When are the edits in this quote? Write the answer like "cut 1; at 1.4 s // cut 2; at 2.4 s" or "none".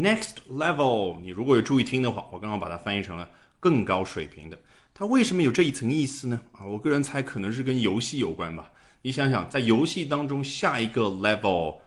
none

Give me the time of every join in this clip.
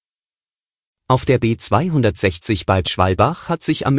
cut 1; at 2.8 s

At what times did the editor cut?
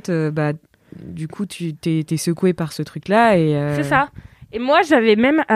none

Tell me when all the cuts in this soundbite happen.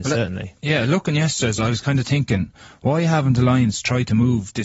cut 1; at 1.6 s

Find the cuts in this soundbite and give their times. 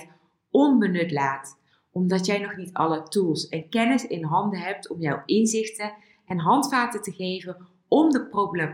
none

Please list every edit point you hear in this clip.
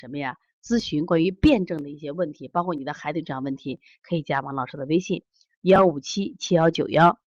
none

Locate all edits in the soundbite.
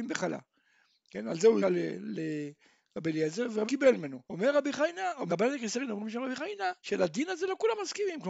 cut 1; at 1.6 s // cut 2; at 3.6 s // cut 3; at 4.2 s // cut 4; at 5.3 s // cut 5; at 6.8 s

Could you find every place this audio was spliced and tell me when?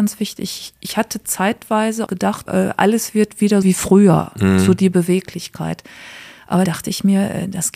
cut 1; at 2.1 s // cut 2; at 2.5 s // cut 3; at 3.6 s // cut 4; at 6.6 s

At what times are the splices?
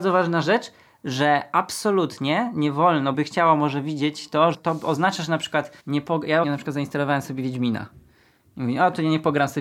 cut 1; at 3.1 s // cut 2; at 4.5 s // cut 3; at 5.8 s // cut 4; at 6.4 s

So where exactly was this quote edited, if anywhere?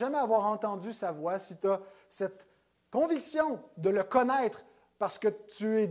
none

